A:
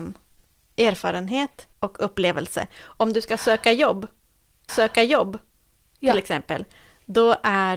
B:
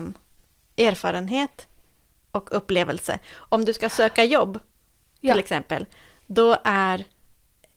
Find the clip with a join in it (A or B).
A